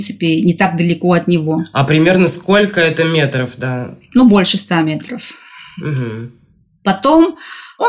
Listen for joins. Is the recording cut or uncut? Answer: uncut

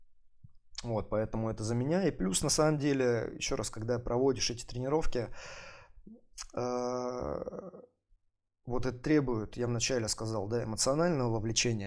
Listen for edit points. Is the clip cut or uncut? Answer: uncut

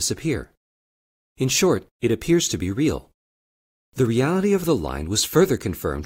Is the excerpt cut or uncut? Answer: uncut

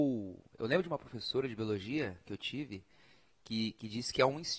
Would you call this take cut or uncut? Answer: uncut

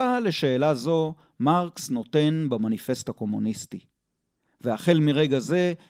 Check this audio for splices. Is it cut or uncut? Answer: uncut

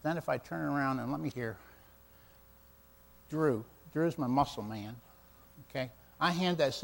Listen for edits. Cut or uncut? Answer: cut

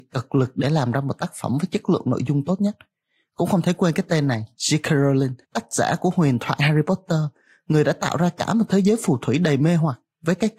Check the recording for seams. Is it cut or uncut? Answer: cut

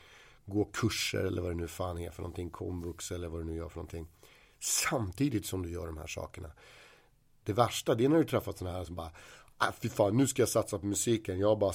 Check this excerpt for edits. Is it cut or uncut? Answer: uncut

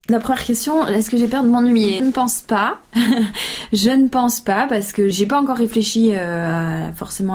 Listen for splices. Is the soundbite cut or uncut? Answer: cut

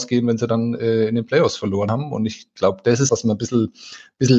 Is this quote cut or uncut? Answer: cut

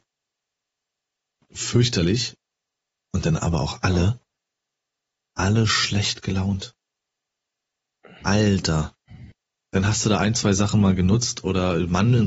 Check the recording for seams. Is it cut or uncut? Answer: uncut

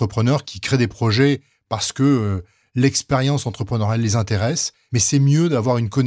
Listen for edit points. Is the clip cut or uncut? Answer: uncut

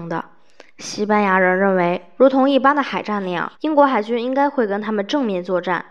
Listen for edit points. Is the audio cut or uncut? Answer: cut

